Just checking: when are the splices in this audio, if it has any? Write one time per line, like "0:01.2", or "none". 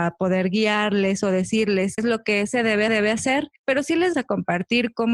0:02.0
0:02.9
0:04.1